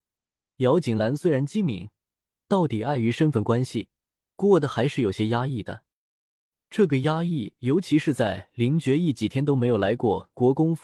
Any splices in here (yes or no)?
no